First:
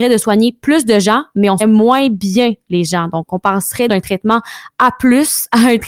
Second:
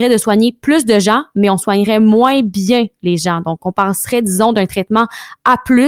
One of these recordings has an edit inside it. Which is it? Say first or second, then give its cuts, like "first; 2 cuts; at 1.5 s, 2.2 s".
first; 2 cuts; at 1.6 s, 3.9 s